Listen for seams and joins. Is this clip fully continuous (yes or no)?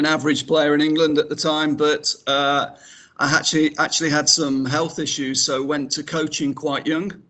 yes